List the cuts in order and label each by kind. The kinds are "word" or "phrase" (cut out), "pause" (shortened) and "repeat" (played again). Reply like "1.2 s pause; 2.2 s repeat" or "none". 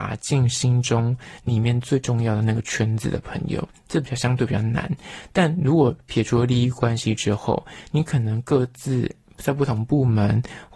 none